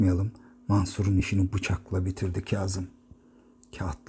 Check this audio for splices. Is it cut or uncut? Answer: uncut